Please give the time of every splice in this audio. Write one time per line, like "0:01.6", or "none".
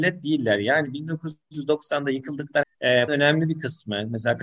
0:02.6
0:03.1